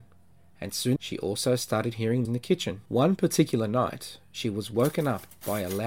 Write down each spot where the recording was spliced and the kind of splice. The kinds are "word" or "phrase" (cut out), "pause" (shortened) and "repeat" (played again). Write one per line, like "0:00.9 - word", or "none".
0:01.0 - word
0:02.2 - word
0:02.9 - pause

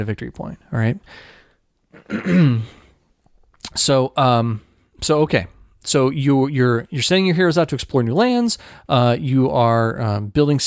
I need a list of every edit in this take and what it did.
none

